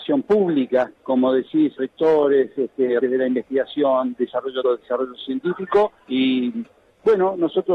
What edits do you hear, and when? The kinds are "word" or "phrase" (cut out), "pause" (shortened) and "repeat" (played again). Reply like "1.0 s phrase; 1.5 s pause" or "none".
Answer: 1.0 s pause; 1.8 s word; 3.0 s word; 4.1 s word; 4.6 s word; 6.0 s pause